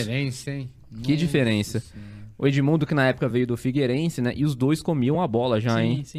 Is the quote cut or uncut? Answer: uncut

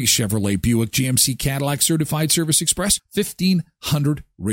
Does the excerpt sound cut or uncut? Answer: uncut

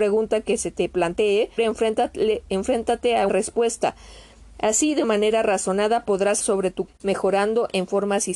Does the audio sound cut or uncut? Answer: cut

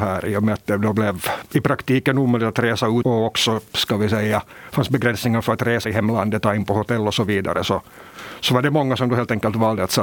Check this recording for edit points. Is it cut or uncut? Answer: cut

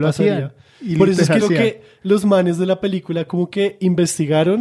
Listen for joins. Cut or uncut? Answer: cut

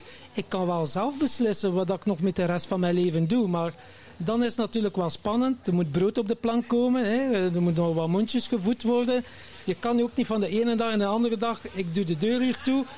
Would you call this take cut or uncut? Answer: uncut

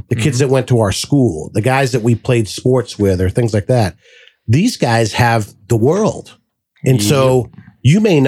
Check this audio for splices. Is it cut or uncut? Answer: uncut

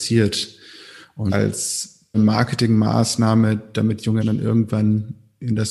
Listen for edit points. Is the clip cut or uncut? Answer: cut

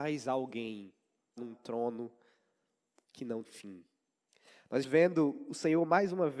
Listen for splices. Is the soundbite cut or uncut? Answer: cut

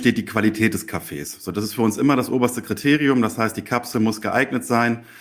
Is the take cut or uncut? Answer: uncut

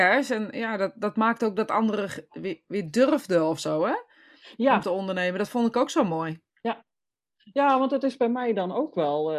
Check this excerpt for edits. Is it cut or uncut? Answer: cut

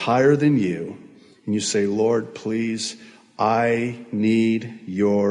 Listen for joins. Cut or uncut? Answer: uncut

